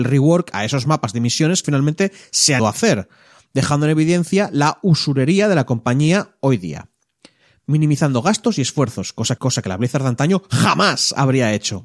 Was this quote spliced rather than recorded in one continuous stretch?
yes; 3 cuts; at 1.6 s, 2.6 s, 9.4 s

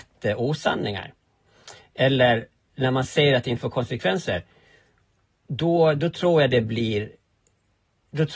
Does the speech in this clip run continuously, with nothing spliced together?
yes; 0 cuts

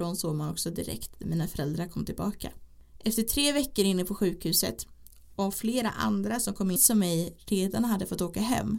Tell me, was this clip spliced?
yes; 1 cut; at 6.8 s

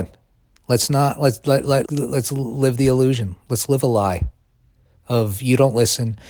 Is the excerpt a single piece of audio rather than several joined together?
no; 1 cut; at 1.9 s

